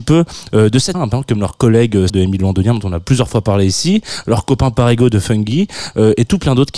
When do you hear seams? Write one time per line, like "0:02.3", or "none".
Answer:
0:00.9
0:02.1